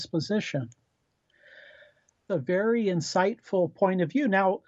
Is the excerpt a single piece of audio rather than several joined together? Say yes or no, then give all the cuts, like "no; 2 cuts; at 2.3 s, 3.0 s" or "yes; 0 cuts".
no; 1 cut; at 2.3 s